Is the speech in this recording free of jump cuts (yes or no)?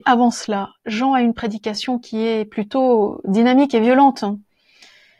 yes